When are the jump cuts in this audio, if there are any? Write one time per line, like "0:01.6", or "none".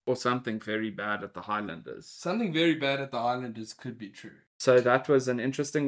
none